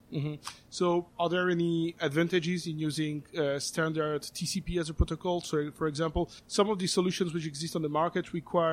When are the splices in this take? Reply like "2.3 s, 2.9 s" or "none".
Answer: 1.1 s, 6.4 s